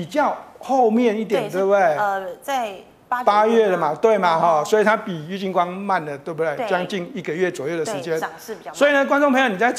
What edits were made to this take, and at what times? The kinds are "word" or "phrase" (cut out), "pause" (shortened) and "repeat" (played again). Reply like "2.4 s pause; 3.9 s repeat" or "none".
none